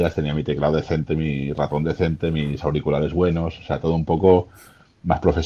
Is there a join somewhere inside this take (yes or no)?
no